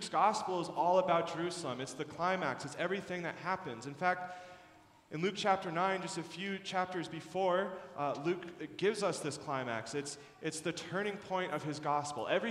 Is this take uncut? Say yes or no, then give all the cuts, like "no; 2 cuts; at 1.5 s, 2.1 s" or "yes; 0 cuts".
yes; 0 cuts